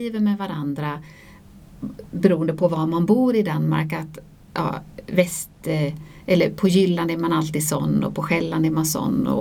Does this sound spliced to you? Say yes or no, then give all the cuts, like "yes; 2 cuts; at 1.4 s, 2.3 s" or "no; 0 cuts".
no; 0 cuts